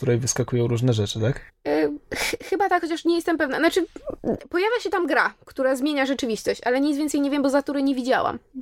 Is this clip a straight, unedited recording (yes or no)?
no